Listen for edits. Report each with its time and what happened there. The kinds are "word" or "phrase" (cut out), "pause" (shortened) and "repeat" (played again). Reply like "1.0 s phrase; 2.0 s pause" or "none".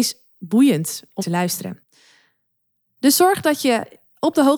1.2 s word